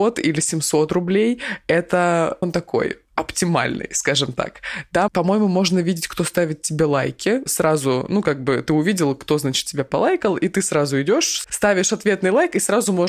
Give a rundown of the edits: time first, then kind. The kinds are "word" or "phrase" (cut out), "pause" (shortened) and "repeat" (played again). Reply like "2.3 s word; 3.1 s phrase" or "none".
2.4 s word; 3.1 s pause; 5.1 s word; 7.5 s word; 11.4 s word